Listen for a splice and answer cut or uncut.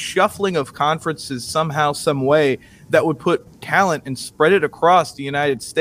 uncut